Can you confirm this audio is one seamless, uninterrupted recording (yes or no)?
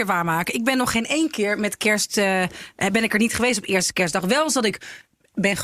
yes